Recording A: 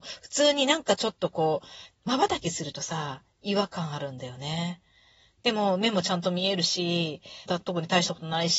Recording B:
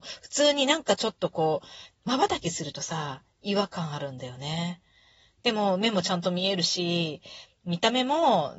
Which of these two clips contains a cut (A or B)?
A